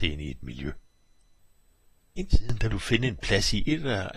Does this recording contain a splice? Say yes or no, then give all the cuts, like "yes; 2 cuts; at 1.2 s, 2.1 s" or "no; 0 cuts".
yes; 2 cuts; at 2.3 s, 2.7 s